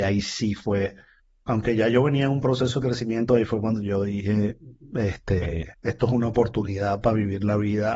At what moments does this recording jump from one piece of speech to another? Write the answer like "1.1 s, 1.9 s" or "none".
1.2 s, 5.7 s